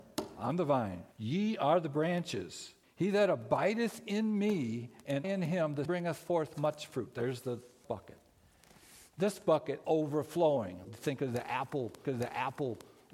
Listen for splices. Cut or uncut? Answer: cut